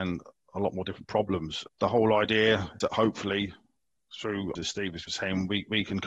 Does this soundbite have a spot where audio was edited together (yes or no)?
yes